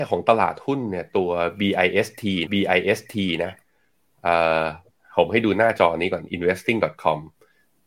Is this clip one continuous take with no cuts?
no; 1 cut; at 2.5 s

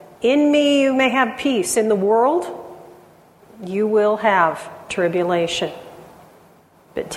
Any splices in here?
no; 0 cuts

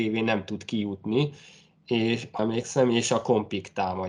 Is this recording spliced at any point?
yes; 1 cut; at 2.4 s

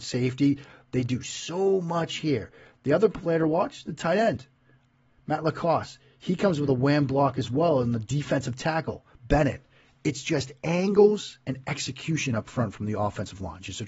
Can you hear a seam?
no; 0 cuts

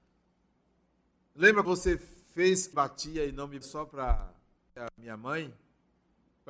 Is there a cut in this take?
yes; 4 cuts; at 1.6 s, 2.7 s, 3.6 s, 4.7 s

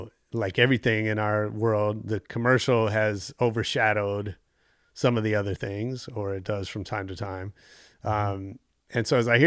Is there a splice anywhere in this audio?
no; 0 cuts

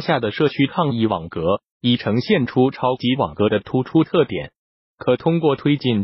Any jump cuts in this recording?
no; 0 cuts

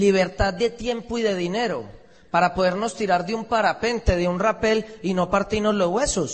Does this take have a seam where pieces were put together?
no; 0 cuts

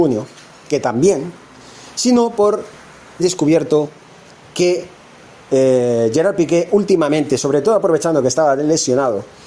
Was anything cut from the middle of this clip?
yes; 1 cut; at 3.2 s

